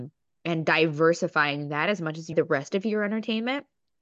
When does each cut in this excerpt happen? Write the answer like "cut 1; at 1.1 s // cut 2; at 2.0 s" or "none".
cut 1; at 2.3 s